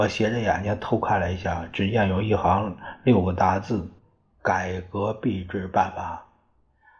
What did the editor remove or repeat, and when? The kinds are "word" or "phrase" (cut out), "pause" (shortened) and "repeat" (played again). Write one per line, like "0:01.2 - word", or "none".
0:04.0 - pause